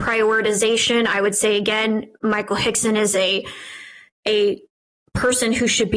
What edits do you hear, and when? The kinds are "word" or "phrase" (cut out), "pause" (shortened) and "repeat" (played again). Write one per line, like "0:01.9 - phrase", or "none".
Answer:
none